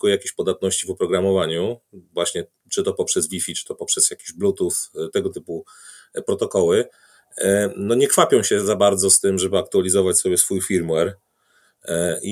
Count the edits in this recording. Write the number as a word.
zero